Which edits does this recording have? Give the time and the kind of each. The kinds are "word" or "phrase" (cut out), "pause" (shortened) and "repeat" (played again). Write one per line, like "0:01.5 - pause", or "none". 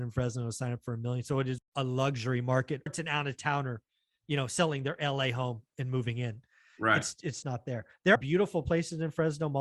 0:01.6 - word
0:02.9 - word
0:07.4 - word
0:08.2 - word